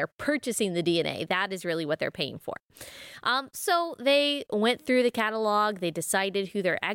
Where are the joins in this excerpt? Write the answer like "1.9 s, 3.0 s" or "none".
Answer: none

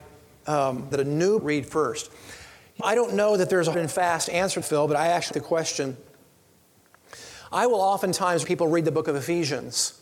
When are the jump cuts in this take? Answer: 0.9 s, 1.4 s, 2.8 s, 3.7 s, 4.6 s, 5.3 s, 8.4 s

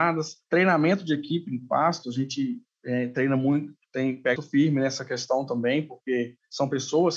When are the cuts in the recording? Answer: 4.3 s

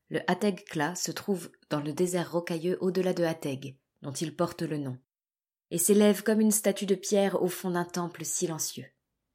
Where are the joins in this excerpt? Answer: none

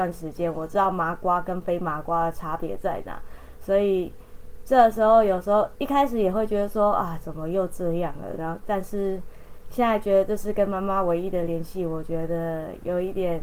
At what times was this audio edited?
none

